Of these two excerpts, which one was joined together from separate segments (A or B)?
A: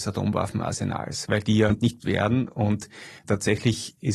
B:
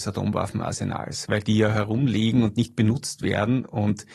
A